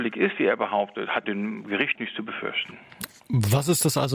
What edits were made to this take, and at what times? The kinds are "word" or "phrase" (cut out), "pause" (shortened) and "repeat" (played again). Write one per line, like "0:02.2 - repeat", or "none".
0:01.2 - phrase
0:01.9 - word